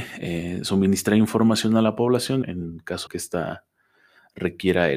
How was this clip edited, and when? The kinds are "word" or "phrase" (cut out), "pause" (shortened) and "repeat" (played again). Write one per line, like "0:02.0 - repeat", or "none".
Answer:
0:02.4 - word
0:03.1 - word